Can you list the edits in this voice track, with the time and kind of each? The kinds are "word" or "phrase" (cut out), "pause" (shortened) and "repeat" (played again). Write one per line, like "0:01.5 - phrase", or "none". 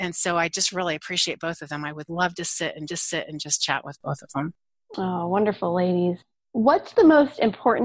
0:02.9 - repeat